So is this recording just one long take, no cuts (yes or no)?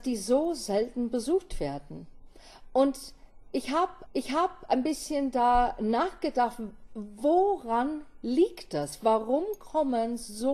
no